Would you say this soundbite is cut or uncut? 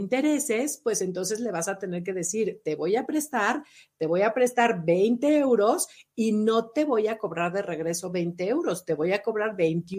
uncut